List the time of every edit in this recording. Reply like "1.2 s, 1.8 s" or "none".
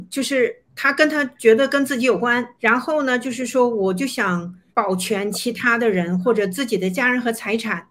2.5 s, 4.7 s